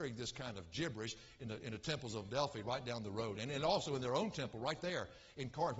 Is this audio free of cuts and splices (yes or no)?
yes